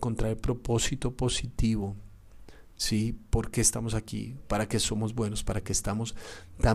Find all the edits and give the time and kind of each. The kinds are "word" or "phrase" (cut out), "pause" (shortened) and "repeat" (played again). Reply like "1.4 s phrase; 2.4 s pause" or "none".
none